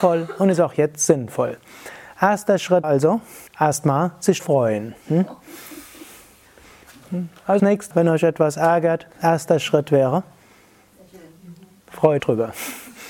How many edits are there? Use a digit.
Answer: 7